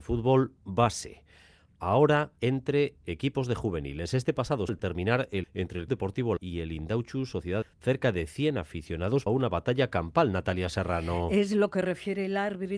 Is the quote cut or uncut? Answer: cut